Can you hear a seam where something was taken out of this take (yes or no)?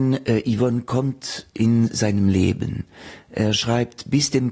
no